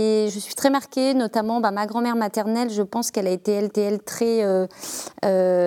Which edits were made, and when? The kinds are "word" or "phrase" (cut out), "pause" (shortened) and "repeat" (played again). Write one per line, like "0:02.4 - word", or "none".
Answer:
0:03.7 - repeat